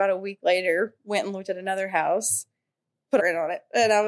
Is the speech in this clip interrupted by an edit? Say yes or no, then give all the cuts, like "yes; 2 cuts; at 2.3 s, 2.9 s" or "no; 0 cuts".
yes; 1 cut; at 3.2 s